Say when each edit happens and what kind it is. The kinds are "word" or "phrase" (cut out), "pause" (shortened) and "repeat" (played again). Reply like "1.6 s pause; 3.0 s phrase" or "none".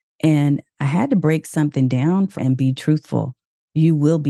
2.4 s word